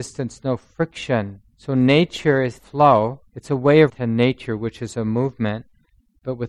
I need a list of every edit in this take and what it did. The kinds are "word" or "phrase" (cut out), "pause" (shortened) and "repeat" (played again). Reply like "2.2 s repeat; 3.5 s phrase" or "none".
1.5 s pause; 2.6 s word; 3.3 s pause; 3.9 s word